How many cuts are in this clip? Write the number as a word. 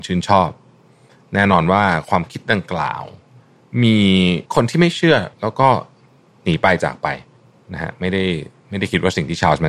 four